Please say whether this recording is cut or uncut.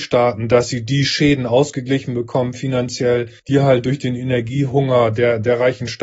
cut